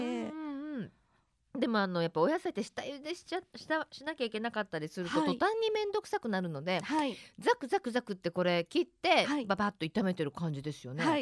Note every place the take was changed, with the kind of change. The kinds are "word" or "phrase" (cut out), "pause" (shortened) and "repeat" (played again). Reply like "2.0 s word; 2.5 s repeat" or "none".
none